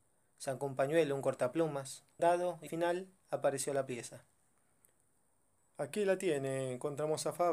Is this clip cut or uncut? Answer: cut